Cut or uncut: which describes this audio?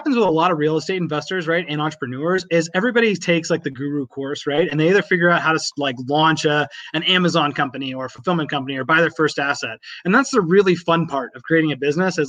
uncut